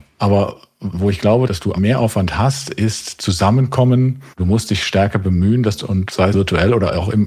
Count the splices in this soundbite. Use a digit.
6